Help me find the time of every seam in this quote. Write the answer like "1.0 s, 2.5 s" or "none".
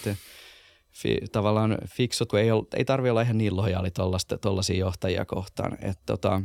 2.3 s